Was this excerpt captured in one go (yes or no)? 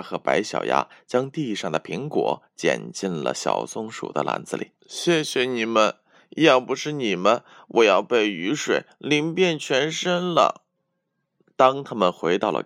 no